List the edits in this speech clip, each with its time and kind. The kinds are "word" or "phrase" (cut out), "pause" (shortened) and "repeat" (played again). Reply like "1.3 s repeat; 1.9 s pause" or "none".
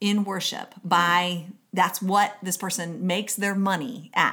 none